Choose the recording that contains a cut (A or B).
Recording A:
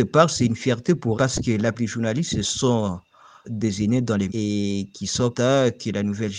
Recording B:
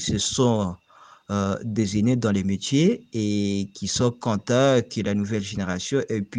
A